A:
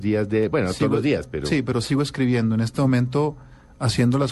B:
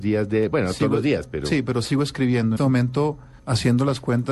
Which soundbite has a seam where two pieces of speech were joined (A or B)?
B